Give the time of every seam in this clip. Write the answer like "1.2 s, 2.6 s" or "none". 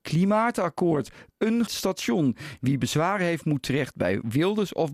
1.7 s